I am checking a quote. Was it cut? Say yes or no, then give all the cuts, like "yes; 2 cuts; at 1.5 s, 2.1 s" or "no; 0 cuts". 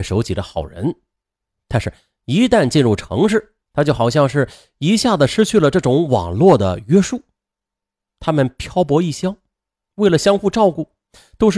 yes; 1 cut; at 3.6 s